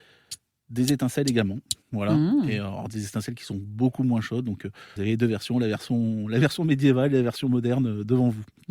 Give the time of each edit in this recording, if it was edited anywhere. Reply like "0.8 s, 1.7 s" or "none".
1.8 s, 5.0 s